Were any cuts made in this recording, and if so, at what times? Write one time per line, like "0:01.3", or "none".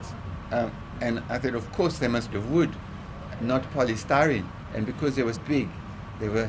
0:02.3
0:03.4
0:05.3